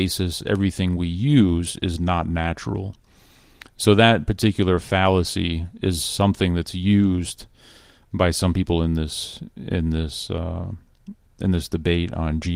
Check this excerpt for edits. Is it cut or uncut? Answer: uncut